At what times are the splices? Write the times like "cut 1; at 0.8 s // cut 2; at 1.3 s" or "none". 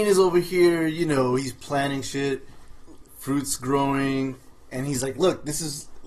none